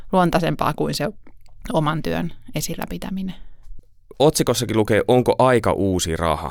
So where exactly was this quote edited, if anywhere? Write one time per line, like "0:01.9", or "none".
none